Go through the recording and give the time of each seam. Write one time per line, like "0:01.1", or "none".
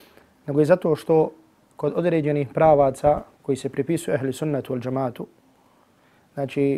none